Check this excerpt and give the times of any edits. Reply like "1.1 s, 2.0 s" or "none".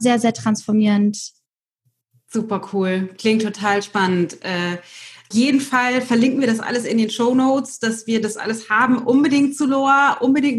5.3 s